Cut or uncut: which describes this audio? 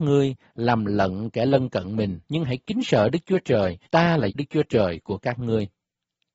cut